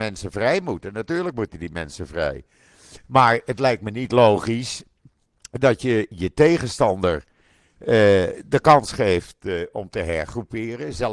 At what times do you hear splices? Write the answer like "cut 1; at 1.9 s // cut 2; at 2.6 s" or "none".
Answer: none